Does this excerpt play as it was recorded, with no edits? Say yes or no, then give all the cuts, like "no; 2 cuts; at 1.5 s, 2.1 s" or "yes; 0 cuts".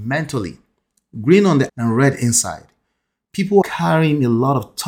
no; 2 cuts; at 1.7 s, 3.6 s